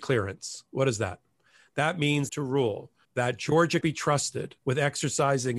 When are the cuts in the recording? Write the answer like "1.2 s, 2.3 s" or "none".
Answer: 2.3 s, 3.0 s, 3.8 s, 4.6 s